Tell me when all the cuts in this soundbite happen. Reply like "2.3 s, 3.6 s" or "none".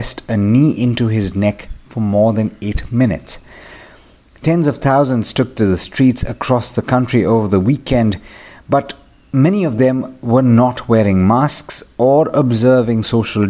none